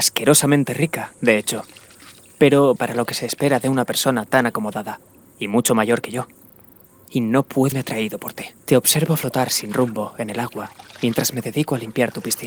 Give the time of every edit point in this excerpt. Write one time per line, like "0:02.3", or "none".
0:02.8
0:05.2
0:06.8
0:07.7
0:08.6